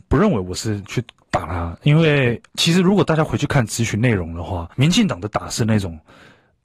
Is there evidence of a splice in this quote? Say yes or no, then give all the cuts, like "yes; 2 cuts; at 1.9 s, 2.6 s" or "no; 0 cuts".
yes; 2 cuts; at 2.5 s, 4.7 s